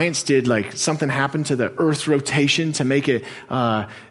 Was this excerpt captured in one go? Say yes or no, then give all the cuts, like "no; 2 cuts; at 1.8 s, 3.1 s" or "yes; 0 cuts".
yes; 0 cuts